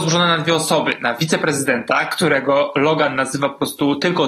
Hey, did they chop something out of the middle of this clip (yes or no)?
no